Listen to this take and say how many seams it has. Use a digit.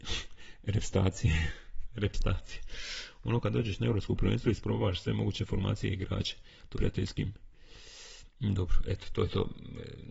2